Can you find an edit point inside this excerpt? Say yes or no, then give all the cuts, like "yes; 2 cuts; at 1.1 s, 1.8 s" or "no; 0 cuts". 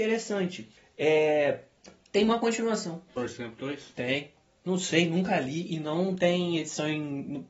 no; 0 cuts